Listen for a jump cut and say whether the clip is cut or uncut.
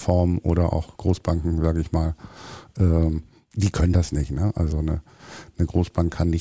uncut